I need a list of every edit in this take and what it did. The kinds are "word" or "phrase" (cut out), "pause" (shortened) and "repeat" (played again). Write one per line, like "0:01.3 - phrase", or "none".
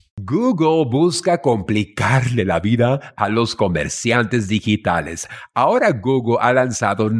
none